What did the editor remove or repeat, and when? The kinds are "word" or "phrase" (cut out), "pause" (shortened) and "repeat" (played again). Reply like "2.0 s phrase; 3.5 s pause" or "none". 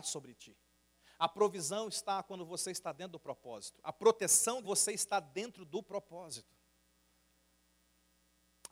4.6 s phrase